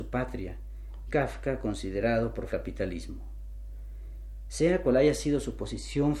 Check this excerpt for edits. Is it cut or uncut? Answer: cut